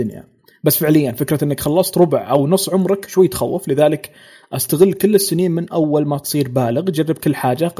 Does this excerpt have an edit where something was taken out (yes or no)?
no